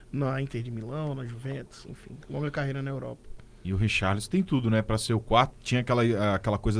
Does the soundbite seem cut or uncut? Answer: uncut